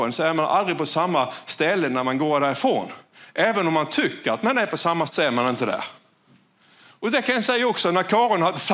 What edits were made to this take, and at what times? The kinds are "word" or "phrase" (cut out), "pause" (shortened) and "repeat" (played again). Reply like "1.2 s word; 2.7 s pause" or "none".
5.1 s word